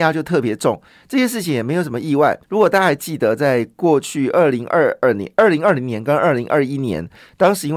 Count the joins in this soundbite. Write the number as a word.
one